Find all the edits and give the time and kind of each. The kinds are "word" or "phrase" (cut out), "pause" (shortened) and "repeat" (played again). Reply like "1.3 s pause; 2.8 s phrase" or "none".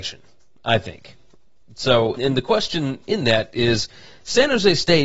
2.2 s word